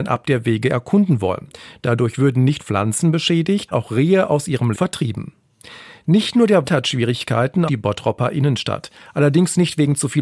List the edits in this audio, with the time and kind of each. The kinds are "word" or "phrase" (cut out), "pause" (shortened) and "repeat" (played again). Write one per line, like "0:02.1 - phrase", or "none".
0:02.6 - word
0:03.7 - word
0:04.7 - word
0:06.6 - word
0:07.7 - word